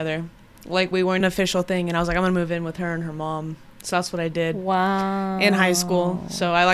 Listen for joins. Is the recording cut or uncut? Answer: cut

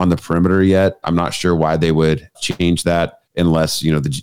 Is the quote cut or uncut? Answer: cut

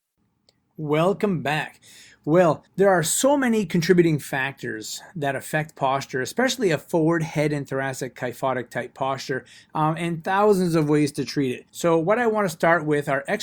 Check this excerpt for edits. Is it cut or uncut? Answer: cut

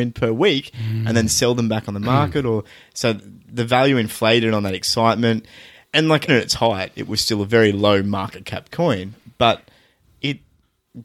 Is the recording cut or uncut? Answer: cut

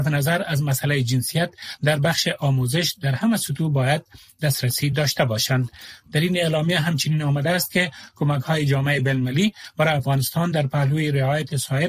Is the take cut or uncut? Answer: uncut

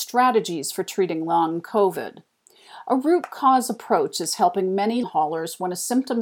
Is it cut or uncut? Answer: cut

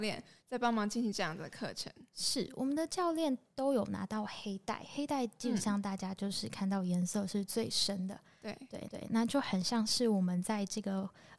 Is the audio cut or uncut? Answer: cut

